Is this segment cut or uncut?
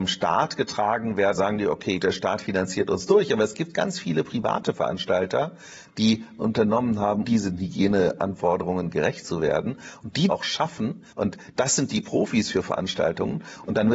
cut